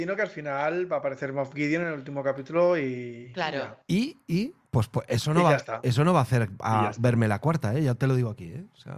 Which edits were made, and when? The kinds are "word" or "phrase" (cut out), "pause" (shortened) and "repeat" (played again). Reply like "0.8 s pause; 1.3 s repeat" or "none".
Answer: 3.8 s pause